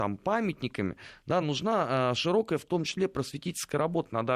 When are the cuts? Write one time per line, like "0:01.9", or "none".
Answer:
none

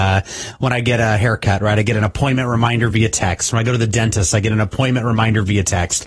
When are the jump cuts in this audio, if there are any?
none

